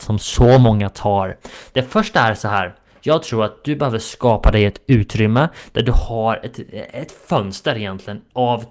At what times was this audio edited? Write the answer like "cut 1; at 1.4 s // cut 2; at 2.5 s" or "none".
none